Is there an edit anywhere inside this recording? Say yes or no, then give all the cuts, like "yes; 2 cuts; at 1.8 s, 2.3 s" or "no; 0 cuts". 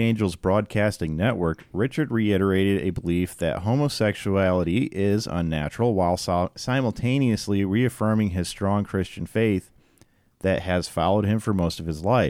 no; 0 cuts